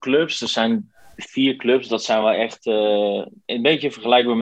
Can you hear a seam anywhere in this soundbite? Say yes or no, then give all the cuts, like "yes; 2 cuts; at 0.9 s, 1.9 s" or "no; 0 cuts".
no; 0 cuts